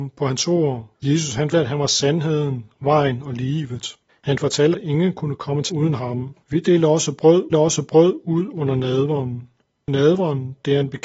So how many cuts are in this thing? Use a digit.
7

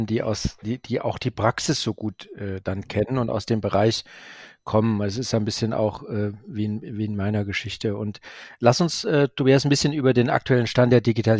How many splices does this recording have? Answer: 0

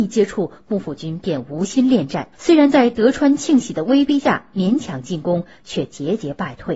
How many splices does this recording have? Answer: 1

